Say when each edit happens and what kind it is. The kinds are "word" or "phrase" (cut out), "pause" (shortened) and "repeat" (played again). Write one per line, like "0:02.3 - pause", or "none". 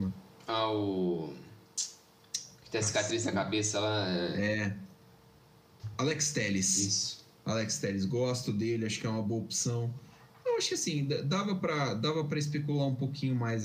0:07.3 - pause